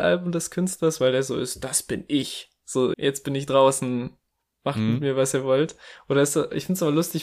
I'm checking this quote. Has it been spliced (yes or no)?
yes